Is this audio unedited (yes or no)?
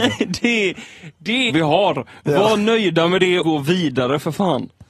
no